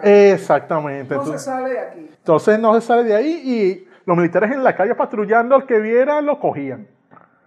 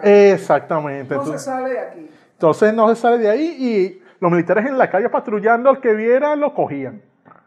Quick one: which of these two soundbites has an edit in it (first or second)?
first